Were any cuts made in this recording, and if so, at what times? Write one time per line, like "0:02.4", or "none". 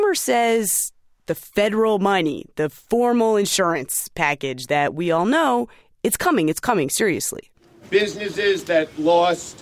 none